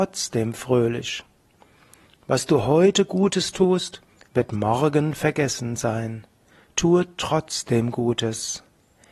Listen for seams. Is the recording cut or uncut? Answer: uncut